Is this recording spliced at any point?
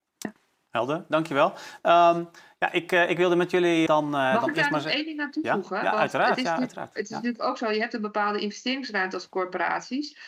yes; 1 cut; at 3.9 s

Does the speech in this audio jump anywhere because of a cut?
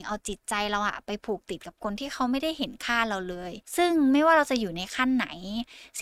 yes; 1 cut; at 3.6 s

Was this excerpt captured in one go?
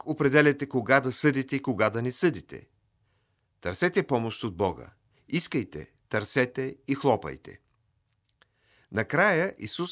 yes; 0 cuts

